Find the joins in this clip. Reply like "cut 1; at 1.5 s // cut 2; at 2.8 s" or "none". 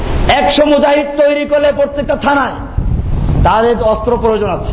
none